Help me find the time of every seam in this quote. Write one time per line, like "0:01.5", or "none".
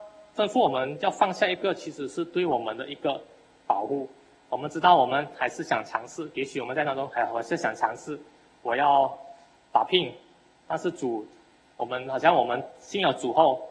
none